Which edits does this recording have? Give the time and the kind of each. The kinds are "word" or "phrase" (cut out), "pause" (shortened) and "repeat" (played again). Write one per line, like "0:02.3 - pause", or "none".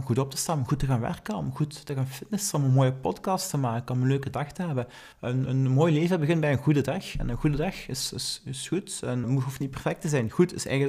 0:05.1 - pause
0:09.2 - word